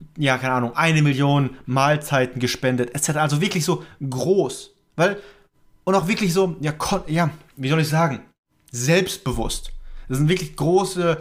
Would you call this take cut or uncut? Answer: uncut